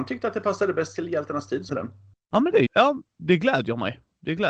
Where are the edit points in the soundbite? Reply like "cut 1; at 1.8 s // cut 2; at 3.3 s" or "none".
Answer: cut 1; at 1.7 s // cut 2; at 2.7 s